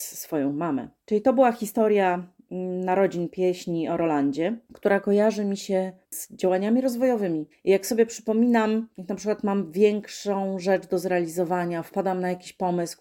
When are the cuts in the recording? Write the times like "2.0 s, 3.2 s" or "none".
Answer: 1.0 s, 7.5 s, 8.9 s